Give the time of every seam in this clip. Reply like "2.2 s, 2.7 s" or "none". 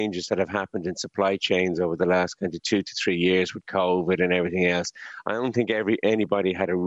none